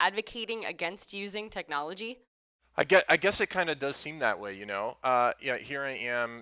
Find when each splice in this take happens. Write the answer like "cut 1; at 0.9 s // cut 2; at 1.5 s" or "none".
none